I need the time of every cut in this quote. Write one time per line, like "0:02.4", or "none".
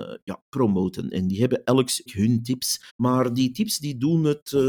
0:02.1
0:02.9